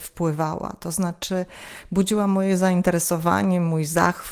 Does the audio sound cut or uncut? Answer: uncut